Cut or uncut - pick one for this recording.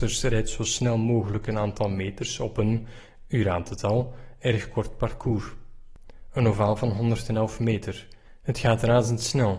uncut